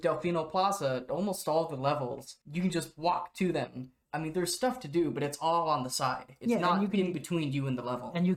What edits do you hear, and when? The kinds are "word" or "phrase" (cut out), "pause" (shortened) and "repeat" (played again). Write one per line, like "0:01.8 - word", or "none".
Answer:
0:02.4 - pause